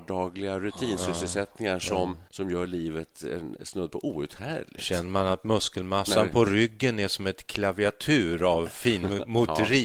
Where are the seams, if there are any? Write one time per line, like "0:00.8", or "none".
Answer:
0:02.3